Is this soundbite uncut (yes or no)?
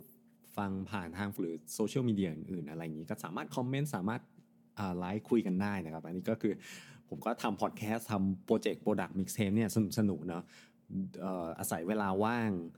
no